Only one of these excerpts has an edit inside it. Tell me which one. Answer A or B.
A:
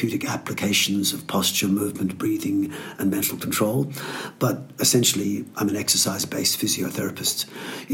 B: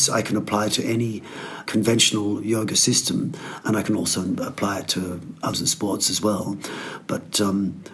B